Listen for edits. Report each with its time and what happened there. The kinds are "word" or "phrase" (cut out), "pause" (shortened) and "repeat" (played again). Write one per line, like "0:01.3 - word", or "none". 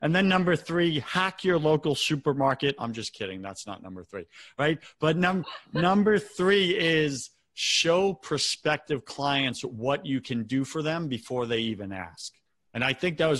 0:12.5 - pause

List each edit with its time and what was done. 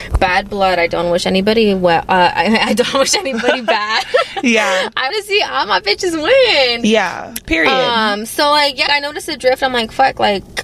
0:05.1 - word
0:08.9 - word

